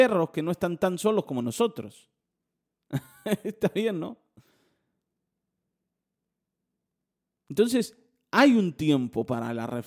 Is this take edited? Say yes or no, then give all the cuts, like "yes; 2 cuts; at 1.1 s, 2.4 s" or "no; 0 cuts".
no; 0 cuts